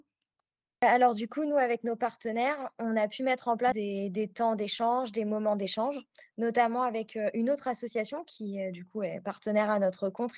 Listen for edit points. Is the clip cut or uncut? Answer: uncut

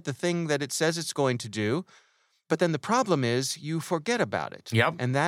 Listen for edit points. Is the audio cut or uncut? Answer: uncut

